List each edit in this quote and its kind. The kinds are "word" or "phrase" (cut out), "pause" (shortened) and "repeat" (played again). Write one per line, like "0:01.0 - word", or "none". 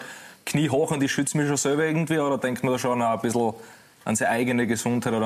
none